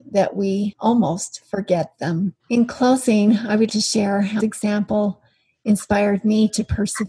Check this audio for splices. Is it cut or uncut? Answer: cut